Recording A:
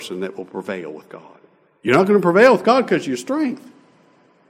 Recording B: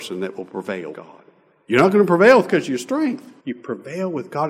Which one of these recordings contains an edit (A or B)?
B